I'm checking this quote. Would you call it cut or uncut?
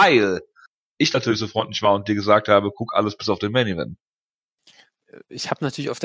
uncut